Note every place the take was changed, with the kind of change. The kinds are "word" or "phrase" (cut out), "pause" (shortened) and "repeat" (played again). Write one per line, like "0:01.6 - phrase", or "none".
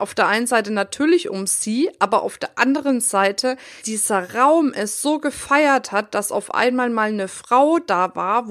0:03.8 - phrase